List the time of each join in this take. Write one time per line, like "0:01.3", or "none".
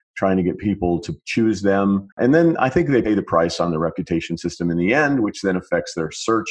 0:02.1